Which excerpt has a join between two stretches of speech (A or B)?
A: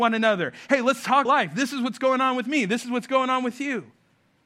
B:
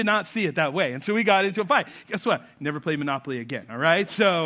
A